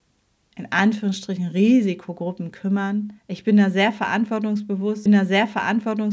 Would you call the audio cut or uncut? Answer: cut